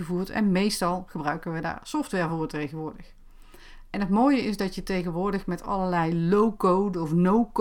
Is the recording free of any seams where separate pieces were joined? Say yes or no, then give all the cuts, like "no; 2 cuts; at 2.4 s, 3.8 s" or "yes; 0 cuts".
yes; 0 cuts